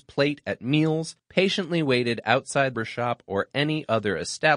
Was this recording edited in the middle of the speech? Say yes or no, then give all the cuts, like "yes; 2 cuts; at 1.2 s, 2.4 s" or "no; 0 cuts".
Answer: yes; 2 cuts; at 1.2 s, 2.7 s